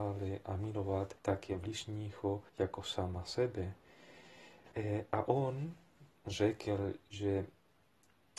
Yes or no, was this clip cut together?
yes